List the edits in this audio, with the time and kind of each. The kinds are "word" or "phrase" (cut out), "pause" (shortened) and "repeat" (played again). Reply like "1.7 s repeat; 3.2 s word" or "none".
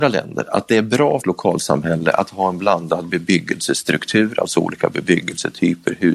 1.2 s phrase